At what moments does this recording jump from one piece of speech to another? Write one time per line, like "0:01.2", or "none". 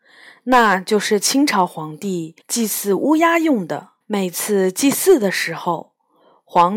0:02.4
0:04.0